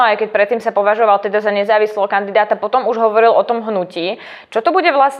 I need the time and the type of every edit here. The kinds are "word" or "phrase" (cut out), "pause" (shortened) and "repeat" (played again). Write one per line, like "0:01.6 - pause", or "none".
none